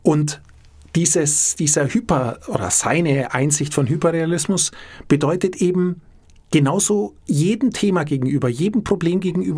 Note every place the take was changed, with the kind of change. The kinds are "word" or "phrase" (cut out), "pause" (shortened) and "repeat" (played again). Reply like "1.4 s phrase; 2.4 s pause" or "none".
7.2 s pause